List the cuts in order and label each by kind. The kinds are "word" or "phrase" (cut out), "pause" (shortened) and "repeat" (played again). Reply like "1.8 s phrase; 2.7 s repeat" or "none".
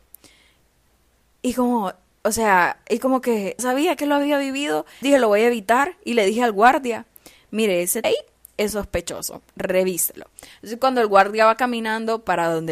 3.6 s word; 5.0 s word; 8.0 s phrase